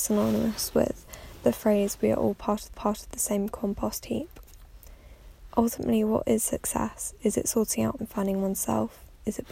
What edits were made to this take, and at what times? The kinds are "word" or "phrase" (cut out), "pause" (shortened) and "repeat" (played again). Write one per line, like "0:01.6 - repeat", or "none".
0:02.7 - repeat
0:08.0 - word